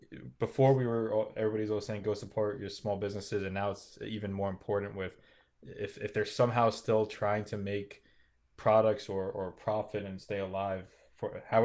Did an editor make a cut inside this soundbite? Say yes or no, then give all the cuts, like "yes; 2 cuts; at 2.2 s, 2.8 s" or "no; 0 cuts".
no; 0 cuts